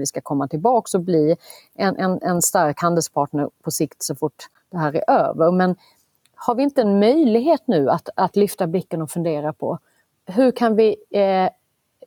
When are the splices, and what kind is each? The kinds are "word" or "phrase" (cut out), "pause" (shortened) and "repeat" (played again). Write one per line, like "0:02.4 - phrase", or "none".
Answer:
none